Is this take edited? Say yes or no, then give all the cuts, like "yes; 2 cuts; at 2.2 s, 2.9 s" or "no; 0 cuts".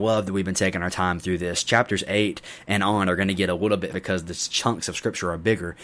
yes; 1 cut; at 3.9 s